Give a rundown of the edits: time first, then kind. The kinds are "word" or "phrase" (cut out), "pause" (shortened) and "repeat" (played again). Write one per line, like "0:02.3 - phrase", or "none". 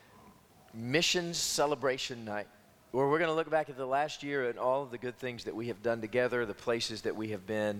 none